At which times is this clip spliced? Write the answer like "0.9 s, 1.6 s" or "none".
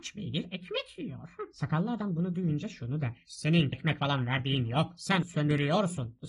3.7 s, 5.2 s